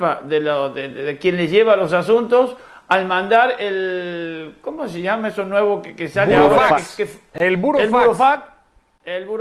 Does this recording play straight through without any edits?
yes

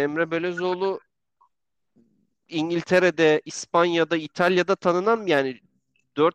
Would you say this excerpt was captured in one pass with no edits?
yes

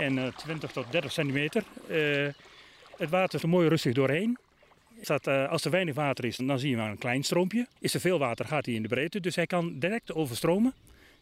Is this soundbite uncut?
no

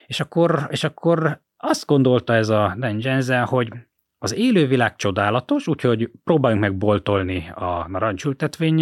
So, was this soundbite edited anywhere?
no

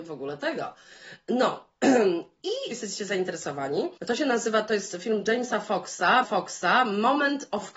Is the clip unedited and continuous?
no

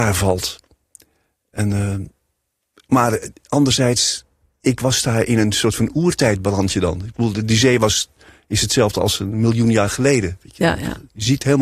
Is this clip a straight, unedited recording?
yes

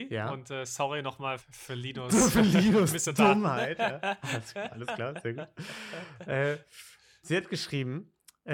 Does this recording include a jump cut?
yes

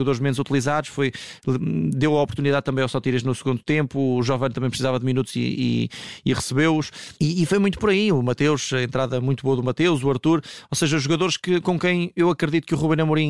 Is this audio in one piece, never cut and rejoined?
no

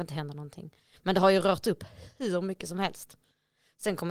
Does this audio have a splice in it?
no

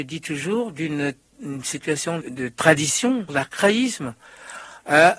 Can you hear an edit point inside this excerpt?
yes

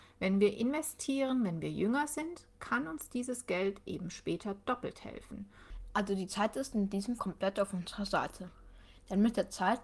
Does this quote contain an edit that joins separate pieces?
yes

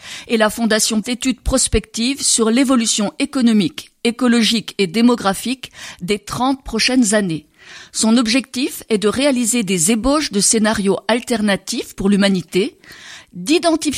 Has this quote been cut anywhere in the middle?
yes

